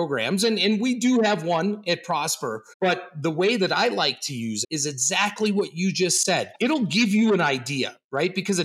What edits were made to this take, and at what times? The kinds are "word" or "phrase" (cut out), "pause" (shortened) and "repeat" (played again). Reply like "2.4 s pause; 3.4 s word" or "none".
2.7 s pause; 4.6 s word; 6.6 s pause

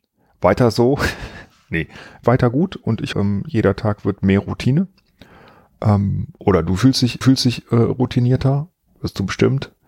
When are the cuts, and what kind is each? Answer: 2.2 s phrase; 3.1 s word; 7.2 s repeat

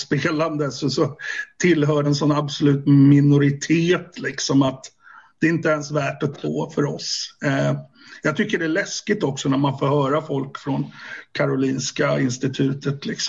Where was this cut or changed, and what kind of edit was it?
2.0 s word; 6.3 s word

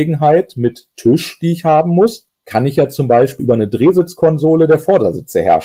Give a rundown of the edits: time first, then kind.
3.4 s word

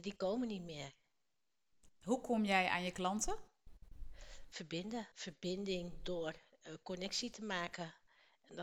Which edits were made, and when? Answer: 5.1 s pause

